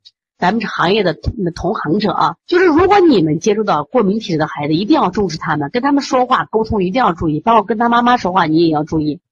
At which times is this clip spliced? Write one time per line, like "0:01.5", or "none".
0:02.4